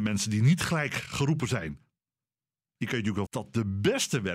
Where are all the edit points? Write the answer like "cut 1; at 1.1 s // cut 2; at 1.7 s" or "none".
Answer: cut 1; at 3.3 s